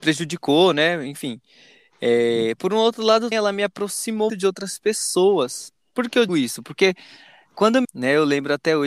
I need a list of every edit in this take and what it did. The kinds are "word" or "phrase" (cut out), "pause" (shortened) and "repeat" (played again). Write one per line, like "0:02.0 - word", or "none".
0:03.3 - word
0:04.3 - word
0:06.3 - word
0:07.8 - word